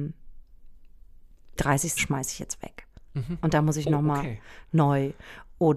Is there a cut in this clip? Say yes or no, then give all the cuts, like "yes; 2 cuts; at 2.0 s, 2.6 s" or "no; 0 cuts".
yes; 2 cuts; at 1.6 s, 2.0 s